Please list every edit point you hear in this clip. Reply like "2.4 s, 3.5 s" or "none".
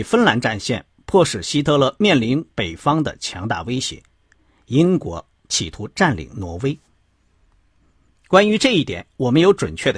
none